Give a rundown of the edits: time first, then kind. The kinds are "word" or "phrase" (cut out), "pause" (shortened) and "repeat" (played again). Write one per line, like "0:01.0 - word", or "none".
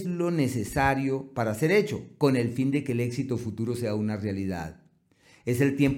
none